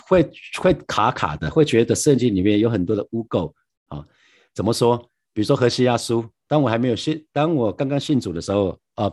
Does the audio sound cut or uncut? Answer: uncut